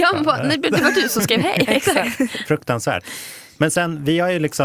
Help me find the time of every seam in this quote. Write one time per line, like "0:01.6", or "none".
none